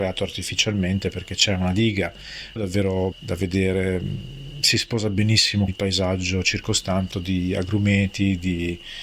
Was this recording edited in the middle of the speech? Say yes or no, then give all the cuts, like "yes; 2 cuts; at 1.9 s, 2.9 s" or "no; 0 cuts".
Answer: yes; 4 cuts; at 2.6 s, 3.1 s, 5.7 s, 7.1 s